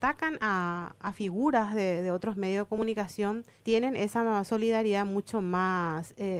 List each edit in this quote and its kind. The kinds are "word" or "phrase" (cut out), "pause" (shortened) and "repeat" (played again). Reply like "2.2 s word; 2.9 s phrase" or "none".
3.6 s word